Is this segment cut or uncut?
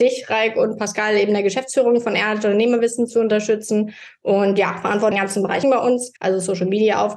cut